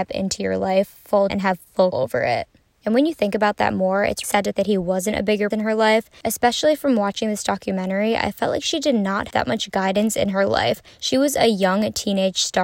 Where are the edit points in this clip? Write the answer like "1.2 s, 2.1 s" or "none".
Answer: 1.3 s, 1.9 s, 4.2 s, 4.5 s, 5.5 s, 9.3 s